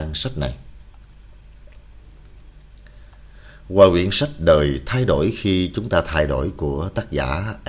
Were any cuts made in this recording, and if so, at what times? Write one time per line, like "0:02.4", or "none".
none